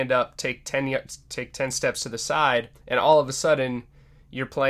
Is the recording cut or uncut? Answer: cut